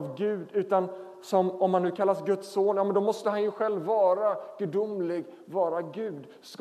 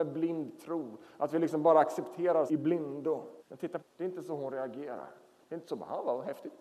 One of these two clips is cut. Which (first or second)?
second